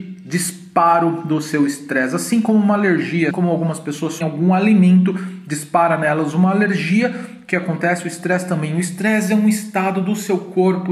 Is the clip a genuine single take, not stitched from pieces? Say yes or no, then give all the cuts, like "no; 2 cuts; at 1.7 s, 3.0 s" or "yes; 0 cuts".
no; 2 cuts; at 3.3 s, 4.2 s